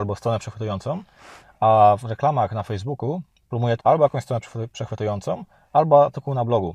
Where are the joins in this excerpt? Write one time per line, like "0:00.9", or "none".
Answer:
0:02.0
0:03.8

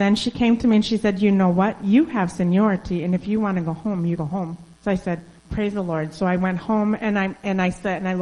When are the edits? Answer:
0:04.2
0:04.8
0:05.4

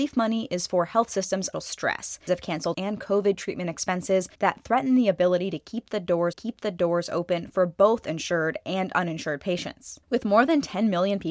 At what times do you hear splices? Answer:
0:01.5
0:02.3
0:02.7
0:04.3
0:06.3
0:10.0

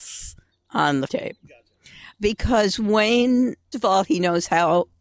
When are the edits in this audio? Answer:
0:01.1
0:03.7

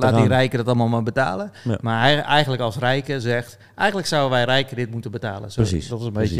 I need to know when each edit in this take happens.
none

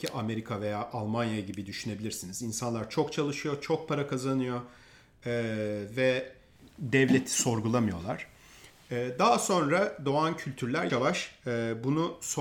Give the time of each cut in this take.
0:10.9

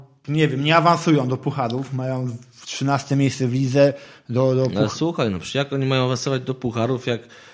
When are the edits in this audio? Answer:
none

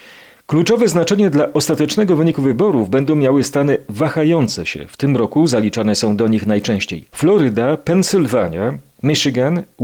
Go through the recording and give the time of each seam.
0:07.1

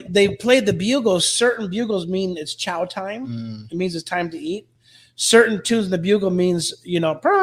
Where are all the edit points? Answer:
none

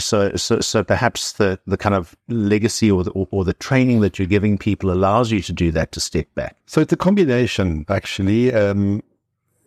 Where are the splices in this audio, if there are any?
0:06.6

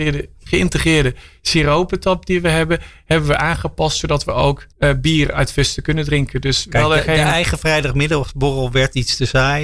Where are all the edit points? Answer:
0:04.7

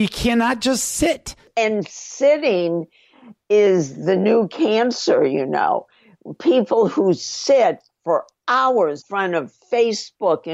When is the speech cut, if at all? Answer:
0:09.0

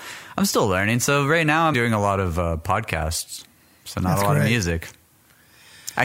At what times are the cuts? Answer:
0:01.7

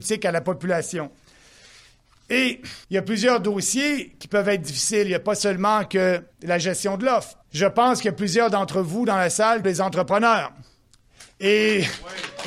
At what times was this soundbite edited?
0:02.8
0:06.3
0:07.4
0:09.6

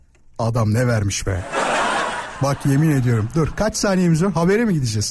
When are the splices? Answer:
none

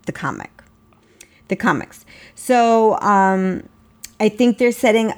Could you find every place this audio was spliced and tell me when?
none

